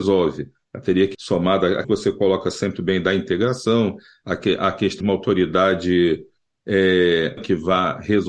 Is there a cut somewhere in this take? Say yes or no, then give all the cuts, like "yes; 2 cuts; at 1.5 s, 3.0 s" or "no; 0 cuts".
yes; 5 cuts; at 1.1 s, 1.8 s, 2.8 s, 5.0 s, 7.4 s